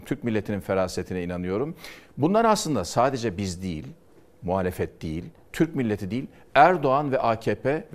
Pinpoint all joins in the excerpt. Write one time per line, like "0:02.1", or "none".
none